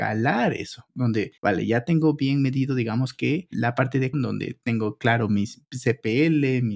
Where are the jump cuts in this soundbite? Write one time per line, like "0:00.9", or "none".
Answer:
0:01.4
0:04.1